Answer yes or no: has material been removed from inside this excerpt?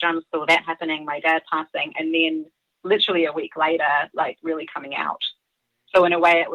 no